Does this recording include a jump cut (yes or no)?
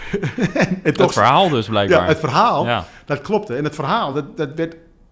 no